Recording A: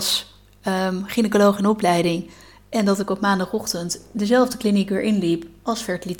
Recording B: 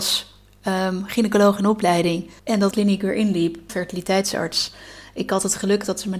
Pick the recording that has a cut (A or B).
B